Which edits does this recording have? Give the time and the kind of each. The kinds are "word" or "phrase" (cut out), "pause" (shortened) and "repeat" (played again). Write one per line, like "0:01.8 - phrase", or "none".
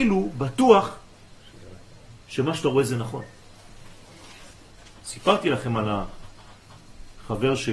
none